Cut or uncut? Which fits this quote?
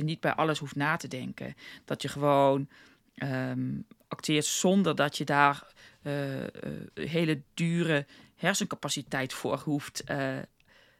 uncut